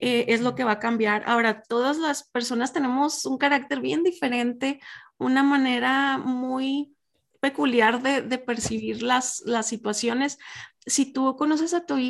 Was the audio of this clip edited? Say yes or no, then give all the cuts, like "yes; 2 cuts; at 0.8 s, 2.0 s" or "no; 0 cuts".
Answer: no; 0 cuts